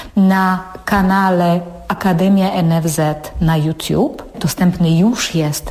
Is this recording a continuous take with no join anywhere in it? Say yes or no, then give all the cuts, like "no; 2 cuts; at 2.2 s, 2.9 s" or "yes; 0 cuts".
yes; 0 cuts